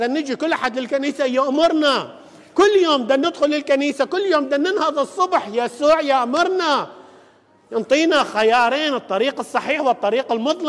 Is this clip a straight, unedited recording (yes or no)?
yes